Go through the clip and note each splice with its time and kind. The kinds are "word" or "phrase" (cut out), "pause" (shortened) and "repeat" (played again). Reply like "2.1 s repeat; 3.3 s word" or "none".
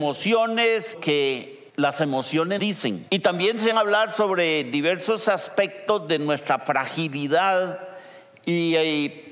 0.9 s phrase; 1.7 s pause; 2.6 s word; 3.1 s pause; 3.7 s word

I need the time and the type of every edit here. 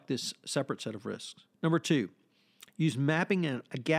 1.5 s pause

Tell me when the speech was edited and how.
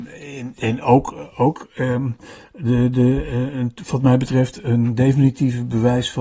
none

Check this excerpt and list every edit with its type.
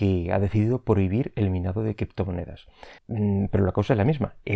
3.0 s pause

